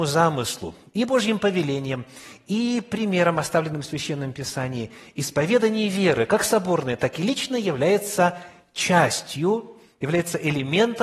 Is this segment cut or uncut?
uncut